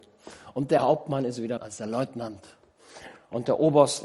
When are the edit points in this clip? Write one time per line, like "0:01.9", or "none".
0:01.6